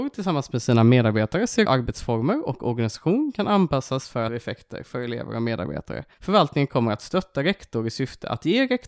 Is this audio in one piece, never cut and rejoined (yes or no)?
no